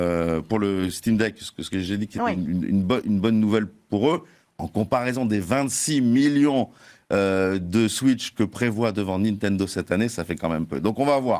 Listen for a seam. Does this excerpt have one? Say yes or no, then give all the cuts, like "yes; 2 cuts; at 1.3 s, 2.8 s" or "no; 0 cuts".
no; 0 cuts